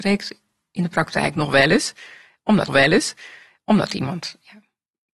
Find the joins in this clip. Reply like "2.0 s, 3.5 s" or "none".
2.7 s